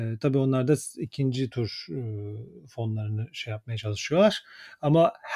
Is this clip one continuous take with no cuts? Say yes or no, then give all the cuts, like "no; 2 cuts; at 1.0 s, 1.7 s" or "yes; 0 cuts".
yes; 0 cuts